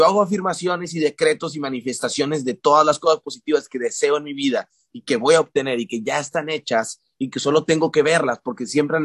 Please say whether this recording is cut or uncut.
uncut